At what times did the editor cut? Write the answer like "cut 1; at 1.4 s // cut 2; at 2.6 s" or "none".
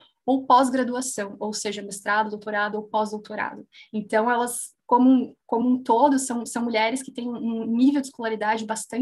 none